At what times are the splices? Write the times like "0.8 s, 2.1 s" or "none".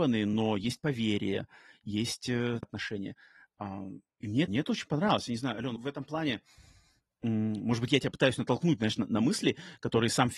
2.6 s, 4.5 s, 5.8 s, 8.1 s